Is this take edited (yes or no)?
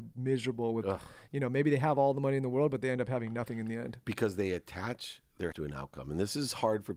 yes